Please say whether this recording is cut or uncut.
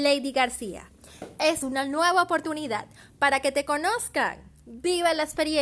cut